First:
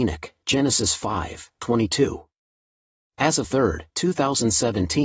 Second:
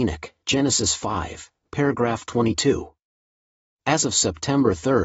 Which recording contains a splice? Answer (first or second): first